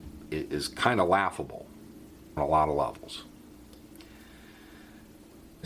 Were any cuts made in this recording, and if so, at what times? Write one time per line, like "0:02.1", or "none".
0:02.4